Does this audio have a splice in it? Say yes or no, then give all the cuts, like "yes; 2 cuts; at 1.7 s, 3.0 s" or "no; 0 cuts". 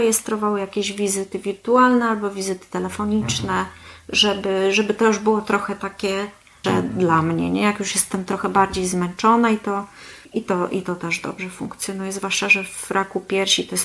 yes; 2 cuts; at 6.6 s, 10.2 s